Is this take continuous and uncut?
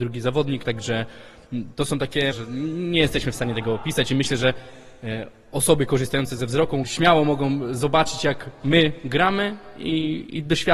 no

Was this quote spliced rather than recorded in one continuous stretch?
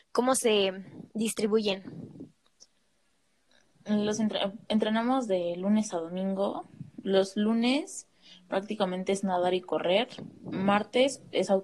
no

